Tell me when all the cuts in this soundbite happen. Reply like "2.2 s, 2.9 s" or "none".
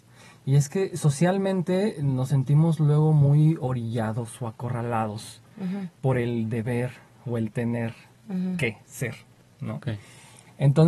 none